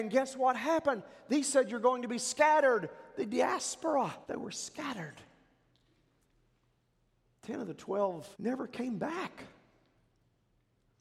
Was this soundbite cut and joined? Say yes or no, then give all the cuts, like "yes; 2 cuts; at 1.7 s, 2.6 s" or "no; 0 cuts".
yes; 2 cuts; at 4.2 s, 8.3 s